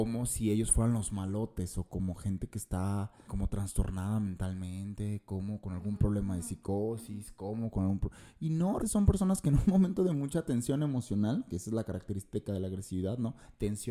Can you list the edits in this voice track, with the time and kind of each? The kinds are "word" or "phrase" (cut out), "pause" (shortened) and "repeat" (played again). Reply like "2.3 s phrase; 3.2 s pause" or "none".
3.3 s word; 8.8 s word